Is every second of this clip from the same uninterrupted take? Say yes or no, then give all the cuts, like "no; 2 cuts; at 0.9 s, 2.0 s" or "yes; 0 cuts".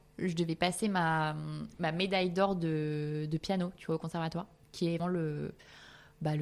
no; 1 cut; at 5.0 s